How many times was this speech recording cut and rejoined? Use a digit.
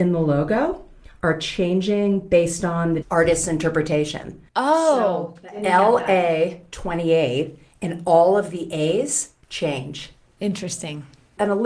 3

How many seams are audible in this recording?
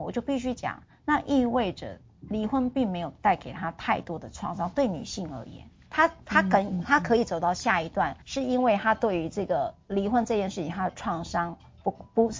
2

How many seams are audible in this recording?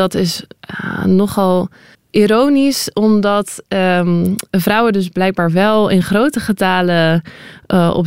1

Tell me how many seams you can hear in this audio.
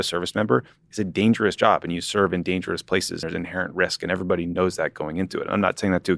1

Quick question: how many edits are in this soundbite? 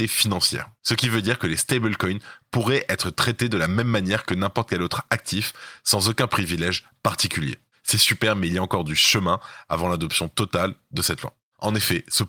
0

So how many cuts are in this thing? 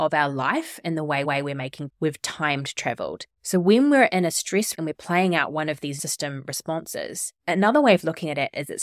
6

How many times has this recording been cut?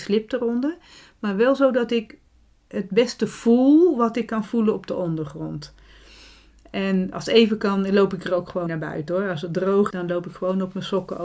3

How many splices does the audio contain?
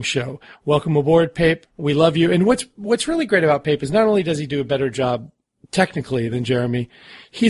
1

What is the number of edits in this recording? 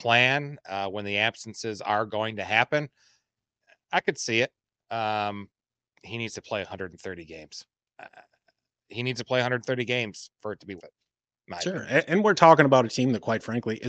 1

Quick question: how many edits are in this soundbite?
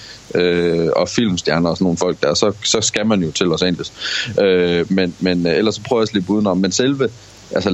0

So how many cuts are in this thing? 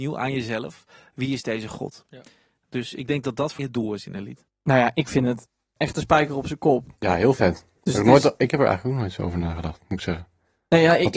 2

